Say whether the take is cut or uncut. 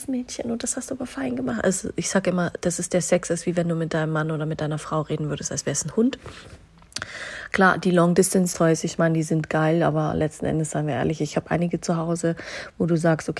cut